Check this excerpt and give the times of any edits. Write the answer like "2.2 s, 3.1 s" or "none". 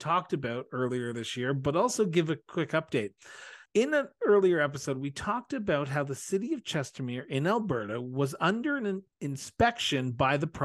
3.7 s, 9.1 s